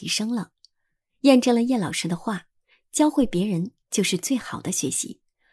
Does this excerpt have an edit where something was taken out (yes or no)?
no